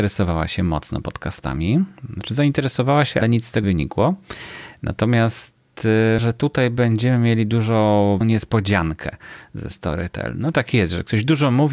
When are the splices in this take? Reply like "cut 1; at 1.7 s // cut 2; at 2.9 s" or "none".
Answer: cut 1; at 3.2 s // cut 2; at 3.6 s // cut 3; at 6.2 s // cut 4; at 8.2 s // cut 5; at 9.7 s // cut 6; at 10.5 s